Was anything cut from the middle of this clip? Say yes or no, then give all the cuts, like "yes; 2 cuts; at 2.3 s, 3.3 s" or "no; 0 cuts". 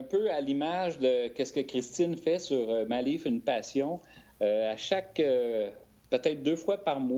no; 0 cuts